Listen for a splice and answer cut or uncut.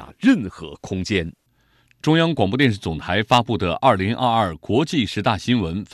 uncut